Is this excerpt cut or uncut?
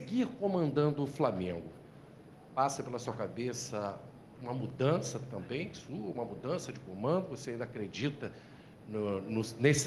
uncut